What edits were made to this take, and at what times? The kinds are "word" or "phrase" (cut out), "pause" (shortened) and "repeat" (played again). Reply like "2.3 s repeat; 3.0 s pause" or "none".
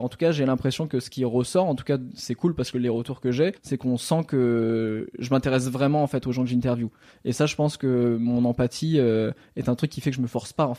3.6 s pause